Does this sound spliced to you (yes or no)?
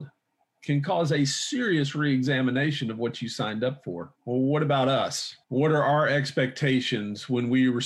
yes